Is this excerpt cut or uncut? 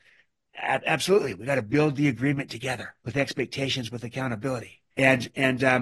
cut